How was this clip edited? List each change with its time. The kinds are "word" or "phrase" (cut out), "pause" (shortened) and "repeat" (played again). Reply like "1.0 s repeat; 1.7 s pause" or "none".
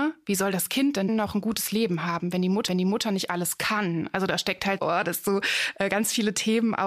1.1 s word; 2.7 s repeat; 4.8 s word